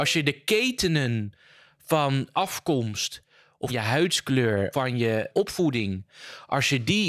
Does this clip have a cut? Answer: yes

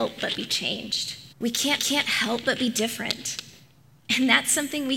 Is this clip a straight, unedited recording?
no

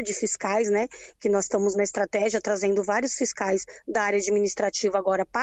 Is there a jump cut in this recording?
yes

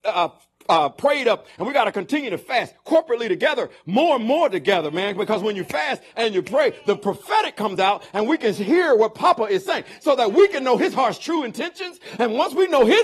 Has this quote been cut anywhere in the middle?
no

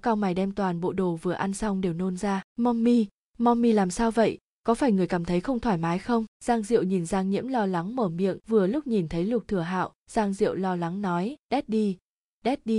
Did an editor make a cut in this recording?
yes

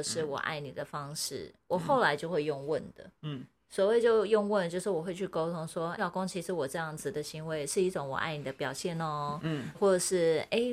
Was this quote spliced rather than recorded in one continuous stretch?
yes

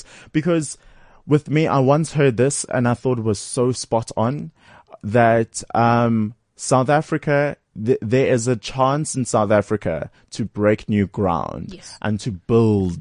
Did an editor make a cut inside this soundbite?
no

